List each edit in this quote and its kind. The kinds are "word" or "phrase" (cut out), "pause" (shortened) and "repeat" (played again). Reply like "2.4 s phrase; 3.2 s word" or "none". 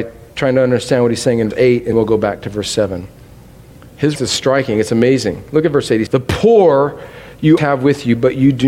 1.5 s word; 1.9 s word; 4.2 s word; 6.1 s word; 7.6 s word